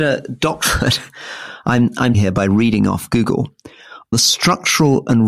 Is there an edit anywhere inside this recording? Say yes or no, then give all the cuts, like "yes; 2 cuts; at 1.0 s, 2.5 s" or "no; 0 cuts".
yes; 2 cuts; at 2.1 s, 4.1 s